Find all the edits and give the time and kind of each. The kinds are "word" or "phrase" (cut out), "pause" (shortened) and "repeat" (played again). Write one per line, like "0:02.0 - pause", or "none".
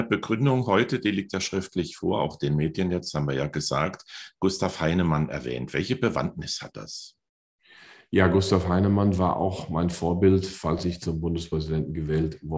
none